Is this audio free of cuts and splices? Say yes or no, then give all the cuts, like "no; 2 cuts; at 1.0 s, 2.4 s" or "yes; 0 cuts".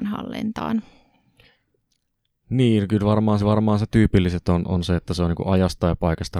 no; 1 cut; at 3.4 s